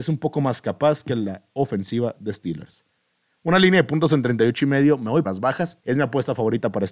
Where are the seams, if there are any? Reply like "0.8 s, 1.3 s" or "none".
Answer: 5.2 s, 5.8 s